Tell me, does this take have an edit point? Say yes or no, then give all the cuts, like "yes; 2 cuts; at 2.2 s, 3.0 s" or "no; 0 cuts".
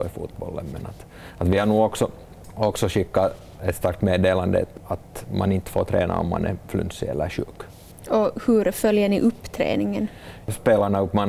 no; 0 cuts